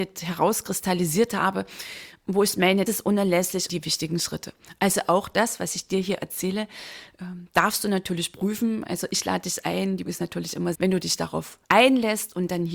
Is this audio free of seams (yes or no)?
no